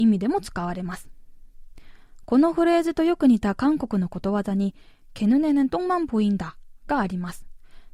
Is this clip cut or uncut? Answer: uncut